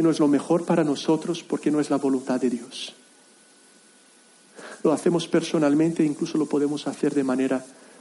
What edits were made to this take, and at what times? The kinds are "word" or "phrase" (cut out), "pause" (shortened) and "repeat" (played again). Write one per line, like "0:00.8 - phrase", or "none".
none